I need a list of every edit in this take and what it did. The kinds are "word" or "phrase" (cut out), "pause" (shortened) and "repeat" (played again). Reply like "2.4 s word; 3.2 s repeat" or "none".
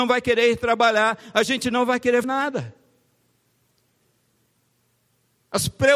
2.2 s word